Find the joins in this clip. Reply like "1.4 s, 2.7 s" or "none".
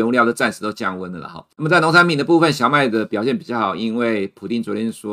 1.5 s